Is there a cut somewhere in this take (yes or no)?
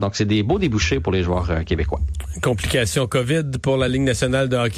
no